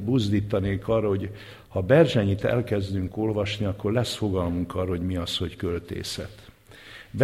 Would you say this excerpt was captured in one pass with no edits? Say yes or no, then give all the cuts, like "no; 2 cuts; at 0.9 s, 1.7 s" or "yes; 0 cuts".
yes; 0 cuts